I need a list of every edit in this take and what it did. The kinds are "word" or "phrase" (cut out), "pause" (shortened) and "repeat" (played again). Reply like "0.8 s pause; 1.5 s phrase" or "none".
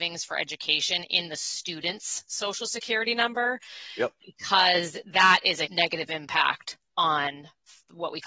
5.6 s word